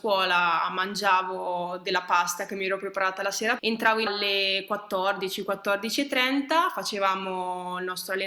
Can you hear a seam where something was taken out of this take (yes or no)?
yes